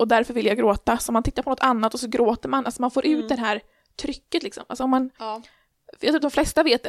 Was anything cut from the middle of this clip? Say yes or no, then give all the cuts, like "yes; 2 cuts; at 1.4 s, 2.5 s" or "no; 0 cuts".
no; 0 cuts